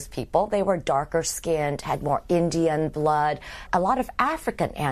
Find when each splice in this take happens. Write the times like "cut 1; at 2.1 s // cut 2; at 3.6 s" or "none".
cut 1; at 3.7 s

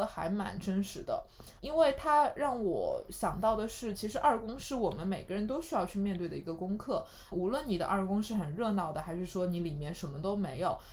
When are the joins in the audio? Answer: cut 1; at 1.6 s // cut 2; at 7.3 s

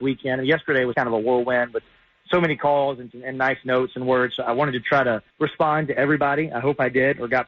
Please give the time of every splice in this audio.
cut 1; at 0.9 s // cut 2; at 3.1 s // cut 3; at 5.3 s

